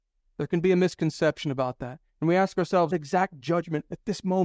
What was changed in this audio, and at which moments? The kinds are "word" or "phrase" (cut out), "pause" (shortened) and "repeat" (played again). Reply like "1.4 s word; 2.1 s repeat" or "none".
2.1 s pause; 2.9 s phrase